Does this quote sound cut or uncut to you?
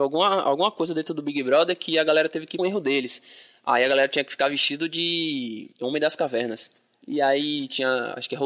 cut